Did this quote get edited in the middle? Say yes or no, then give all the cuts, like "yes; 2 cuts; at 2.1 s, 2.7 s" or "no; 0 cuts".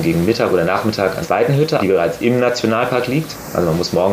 yes; 2 cuts; at 1.2 s, 1.8 s